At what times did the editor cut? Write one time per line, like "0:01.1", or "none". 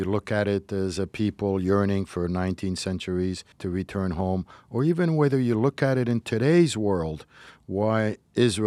0:03.5